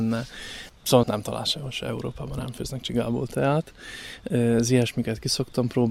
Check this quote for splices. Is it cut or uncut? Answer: cut